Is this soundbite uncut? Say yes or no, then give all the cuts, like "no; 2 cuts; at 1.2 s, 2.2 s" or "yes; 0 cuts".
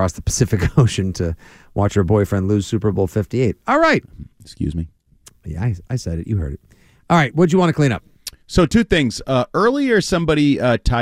yes; 0 cuts